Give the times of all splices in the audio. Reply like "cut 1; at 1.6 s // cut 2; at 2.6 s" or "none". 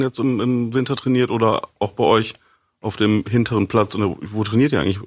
none